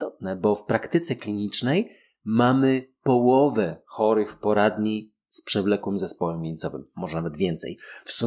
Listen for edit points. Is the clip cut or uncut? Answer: uncut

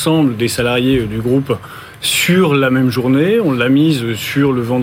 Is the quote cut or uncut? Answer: uncut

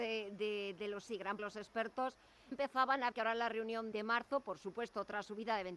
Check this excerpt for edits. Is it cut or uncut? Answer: cut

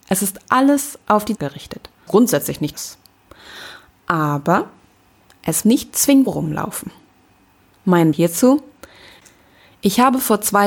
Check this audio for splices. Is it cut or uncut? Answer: cut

